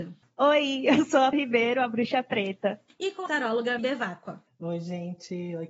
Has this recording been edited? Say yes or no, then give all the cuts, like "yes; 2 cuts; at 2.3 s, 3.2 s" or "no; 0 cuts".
yes; 3 cuts; at 1.3 s, 3.3 s, 3.8 s